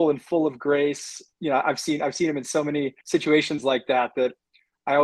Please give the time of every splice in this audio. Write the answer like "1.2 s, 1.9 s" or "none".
3.0 s